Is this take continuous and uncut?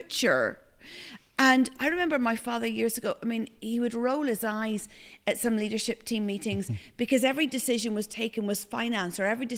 yes; 0 cuts

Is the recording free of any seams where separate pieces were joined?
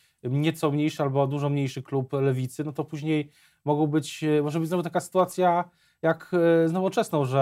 yes; 0 cuts

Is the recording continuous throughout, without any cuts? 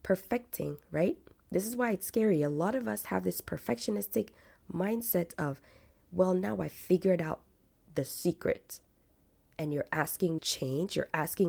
no; 1 cut; at 10.4 s

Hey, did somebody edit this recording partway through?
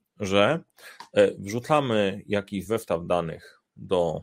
no; 0 cuts

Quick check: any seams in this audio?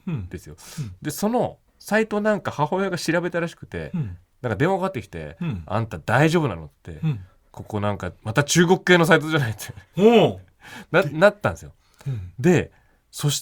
no; 0 cuts

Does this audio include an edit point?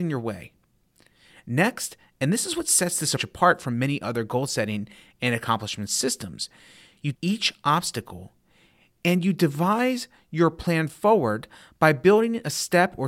yes; 2 cuts; at 3.2 s, 7.1 s

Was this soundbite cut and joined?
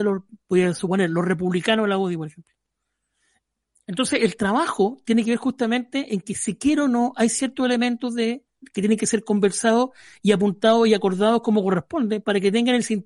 no; 0 cuts

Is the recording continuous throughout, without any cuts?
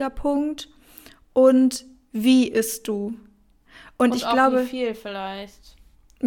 yes; 0 cuts

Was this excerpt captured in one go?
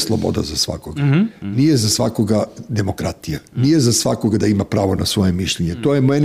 yes; 0 cuts

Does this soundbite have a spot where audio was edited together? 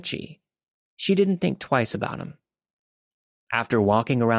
no; 0 cuts

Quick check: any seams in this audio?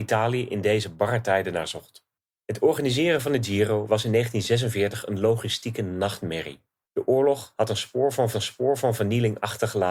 yes; 2 cuts; at 6.8 s, 8.3 s

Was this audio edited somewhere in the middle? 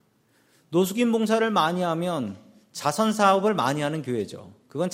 no; 0 cuts

